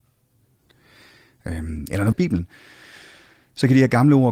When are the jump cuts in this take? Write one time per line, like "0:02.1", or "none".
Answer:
0:02.1